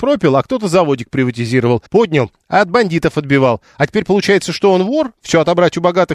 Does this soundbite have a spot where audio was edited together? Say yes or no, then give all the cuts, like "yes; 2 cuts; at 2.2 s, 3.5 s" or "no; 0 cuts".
yes; 1 cut; at 1.9 s